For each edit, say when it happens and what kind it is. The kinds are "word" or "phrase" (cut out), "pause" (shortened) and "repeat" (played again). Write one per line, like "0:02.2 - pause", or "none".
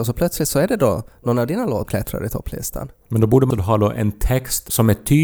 0:01.9 - word
0:03.5 - word